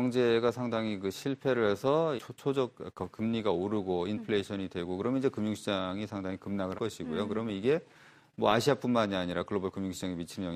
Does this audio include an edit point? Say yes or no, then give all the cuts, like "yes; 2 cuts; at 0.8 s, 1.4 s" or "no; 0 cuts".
yes; 2 cuts; at 2.2 s, 6.7 s